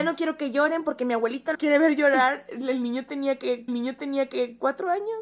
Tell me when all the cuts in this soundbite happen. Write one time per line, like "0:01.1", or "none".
0:01.5
0:03.7